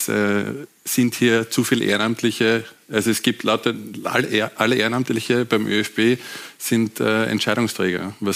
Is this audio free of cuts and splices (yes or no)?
yes